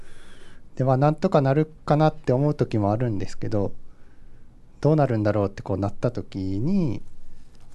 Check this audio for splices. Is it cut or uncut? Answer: uncut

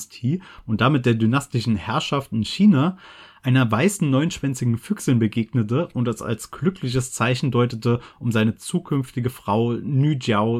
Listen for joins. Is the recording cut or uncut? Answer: uncut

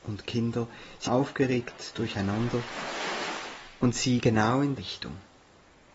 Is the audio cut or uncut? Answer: cut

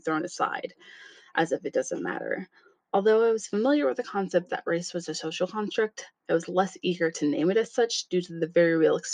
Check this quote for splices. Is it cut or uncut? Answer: uncut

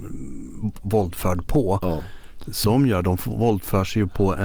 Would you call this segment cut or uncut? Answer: cut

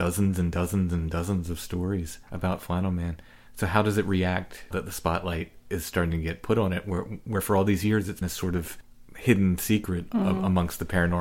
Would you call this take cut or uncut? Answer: cut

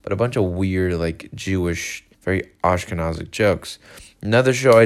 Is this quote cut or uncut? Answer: cut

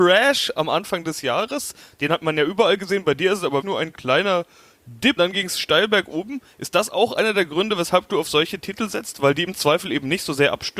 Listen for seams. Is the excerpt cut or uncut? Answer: cut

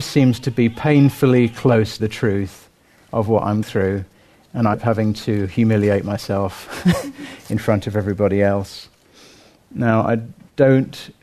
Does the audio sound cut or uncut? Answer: cut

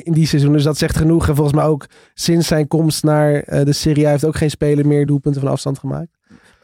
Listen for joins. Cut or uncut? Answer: uncut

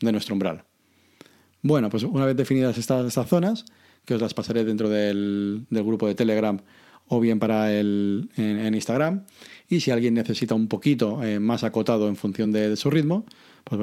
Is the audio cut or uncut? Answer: uncut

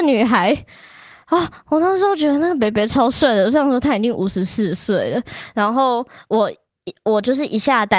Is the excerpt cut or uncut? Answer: uncut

